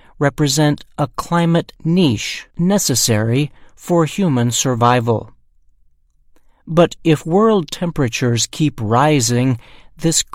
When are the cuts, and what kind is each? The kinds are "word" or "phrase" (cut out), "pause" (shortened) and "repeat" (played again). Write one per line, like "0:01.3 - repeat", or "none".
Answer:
0:02.5 - pause